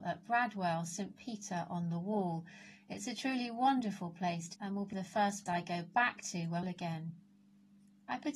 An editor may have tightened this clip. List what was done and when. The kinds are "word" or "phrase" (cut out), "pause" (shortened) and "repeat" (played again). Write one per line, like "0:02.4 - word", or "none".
0:04.5 - word
0:04.9 - phrase
0:05.5 - word
0:06.6 - phrase